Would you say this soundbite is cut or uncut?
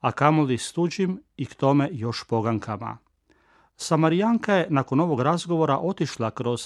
uncut